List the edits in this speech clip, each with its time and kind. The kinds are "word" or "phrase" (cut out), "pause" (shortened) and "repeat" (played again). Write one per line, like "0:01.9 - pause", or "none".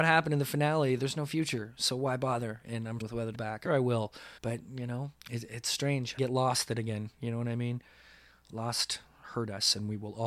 0:03.0 - word
0:03.3 - word
0:03.6 - word
0:04.4 - pause
0:05.2 - pause
0:06.2 - phrase